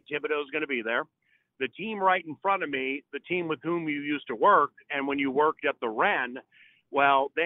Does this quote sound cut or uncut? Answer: uncut